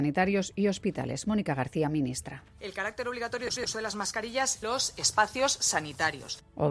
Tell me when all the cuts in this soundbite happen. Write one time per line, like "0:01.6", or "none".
0:03.6
0:04.6